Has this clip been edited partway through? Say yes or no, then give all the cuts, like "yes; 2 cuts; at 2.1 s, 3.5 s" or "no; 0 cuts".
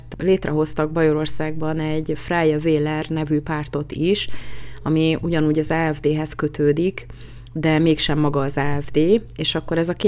no; 0 cuts